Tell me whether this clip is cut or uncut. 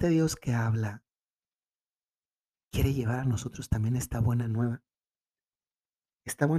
uncut